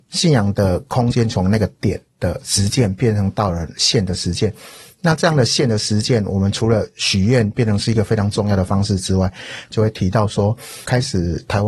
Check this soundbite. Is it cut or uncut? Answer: uncut